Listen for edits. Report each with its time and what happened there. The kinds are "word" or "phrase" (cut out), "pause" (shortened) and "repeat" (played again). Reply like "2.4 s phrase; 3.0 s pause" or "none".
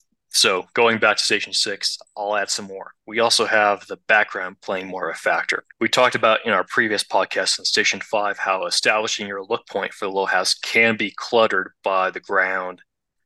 5.7 s pause